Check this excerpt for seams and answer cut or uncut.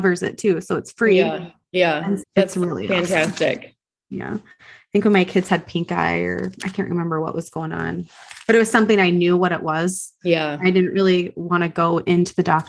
cut